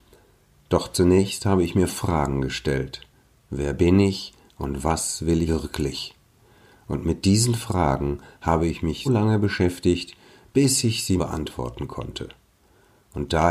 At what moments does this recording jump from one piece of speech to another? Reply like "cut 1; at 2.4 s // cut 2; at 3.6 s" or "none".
cut 1; at 1.9 s // cut 2; at 5.5 s // cut 3; at 9.1 s // cut 4; at 11.2 s